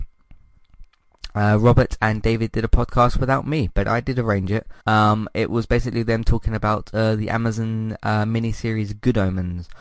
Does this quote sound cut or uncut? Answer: cut